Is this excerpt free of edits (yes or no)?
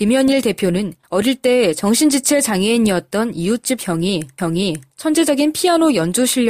no